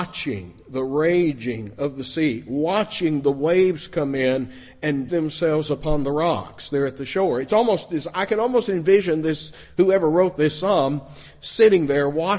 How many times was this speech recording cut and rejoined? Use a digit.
1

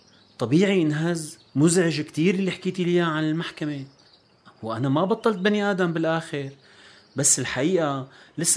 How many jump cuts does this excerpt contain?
1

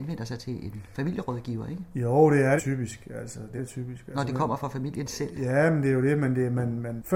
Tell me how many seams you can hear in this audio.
2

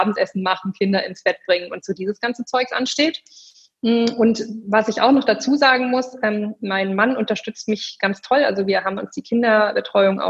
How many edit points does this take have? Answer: 0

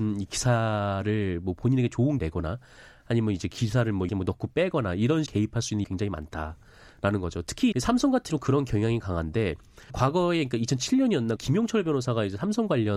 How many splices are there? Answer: 8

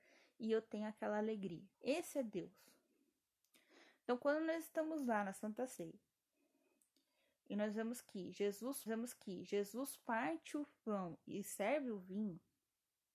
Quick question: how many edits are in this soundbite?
2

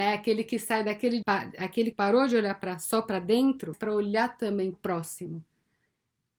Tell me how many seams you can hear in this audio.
4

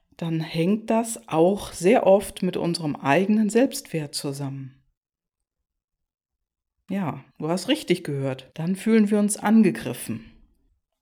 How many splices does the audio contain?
2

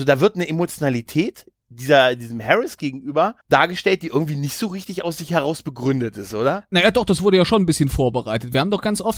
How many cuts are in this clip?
1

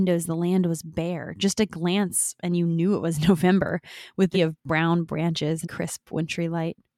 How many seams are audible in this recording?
2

